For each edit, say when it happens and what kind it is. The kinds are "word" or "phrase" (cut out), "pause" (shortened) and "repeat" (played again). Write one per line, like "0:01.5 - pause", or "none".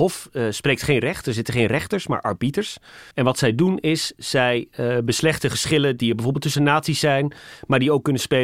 0:03.1 - pause